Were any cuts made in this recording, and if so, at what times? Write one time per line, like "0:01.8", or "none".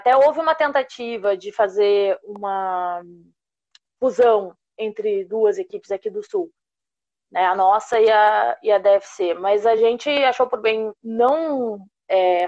none

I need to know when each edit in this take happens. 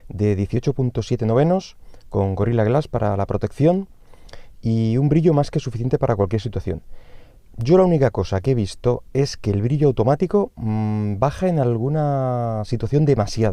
none

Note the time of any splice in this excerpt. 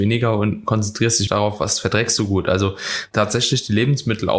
0:01.3

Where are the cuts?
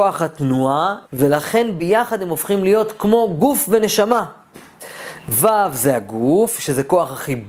0:01.0

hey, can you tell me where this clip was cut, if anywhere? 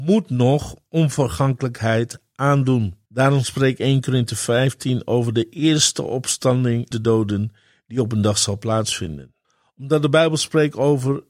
0:03.1
0:06.9
0:09.4

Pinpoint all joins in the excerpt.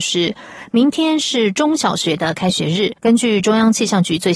0:03.0

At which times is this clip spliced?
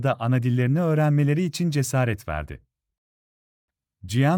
none

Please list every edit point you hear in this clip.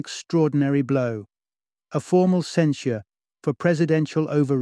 none

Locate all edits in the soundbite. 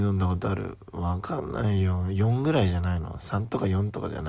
none

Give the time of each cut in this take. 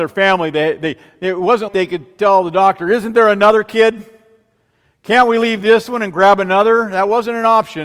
0:01.7

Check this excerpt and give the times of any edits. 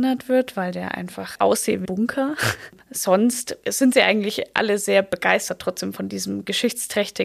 0:01.3
0:01.8
0:03.6

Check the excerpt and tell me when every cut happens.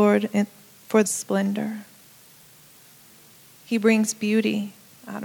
0:01.0

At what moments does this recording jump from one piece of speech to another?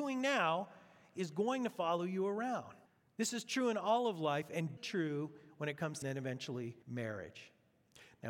0:02.9
0:04.8
0:06.0
0:06.8

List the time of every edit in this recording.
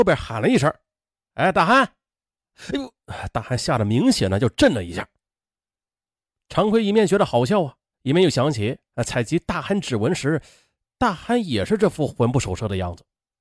none

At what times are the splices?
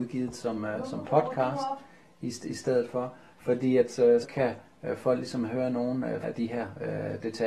0:04.2
0:06.2

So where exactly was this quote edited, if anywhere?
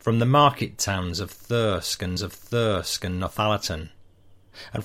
0:02.2

